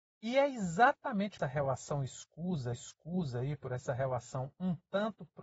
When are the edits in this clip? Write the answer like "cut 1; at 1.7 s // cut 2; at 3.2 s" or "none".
cut 1; at 1.4 s // cut 2; at 2.7 s